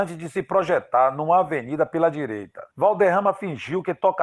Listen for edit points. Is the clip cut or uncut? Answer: cut